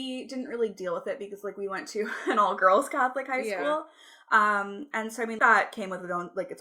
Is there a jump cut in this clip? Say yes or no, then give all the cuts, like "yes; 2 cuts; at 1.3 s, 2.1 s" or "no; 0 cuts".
yes; 1 cut; at 5.4 s